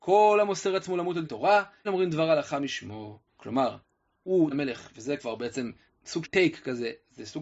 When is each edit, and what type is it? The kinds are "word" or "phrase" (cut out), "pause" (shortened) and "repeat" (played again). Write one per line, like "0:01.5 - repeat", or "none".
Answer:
0:01.2 - word
0:01.8 - word
0:03.3 - pause
0:04.5 - word
0:05.2 - word
0:05.9 - word
0:06.2 - word